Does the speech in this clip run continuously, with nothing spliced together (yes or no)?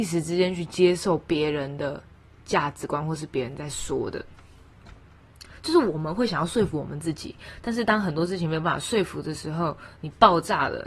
yes